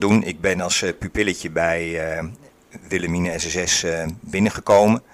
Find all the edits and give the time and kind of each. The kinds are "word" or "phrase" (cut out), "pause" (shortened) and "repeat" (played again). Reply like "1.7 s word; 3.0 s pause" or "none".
none